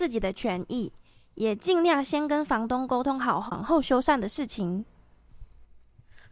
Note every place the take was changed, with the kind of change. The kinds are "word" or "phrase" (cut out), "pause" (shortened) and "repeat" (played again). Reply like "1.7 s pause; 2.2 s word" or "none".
none